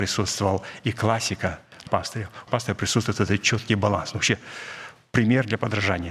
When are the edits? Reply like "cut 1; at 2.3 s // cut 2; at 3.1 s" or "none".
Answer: cut 1; at 1.9 s // cut 2; at 2.5 s